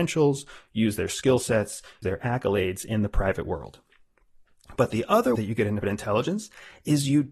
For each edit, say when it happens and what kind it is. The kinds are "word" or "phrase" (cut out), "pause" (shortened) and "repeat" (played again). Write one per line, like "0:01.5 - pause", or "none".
0:02.0 - word
0:05.4 - word
0:05.8 - word